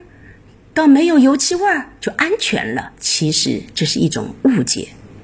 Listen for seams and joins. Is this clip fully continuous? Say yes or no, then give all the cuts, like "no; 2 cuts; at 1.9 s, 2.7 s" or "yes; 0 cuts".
no; 1 cut; at 2.9 s